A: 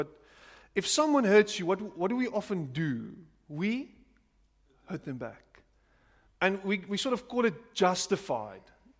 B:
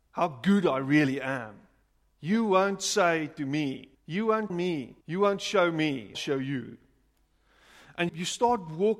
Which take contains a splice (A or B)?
B